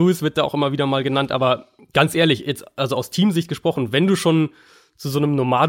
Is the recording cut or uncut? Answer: uncut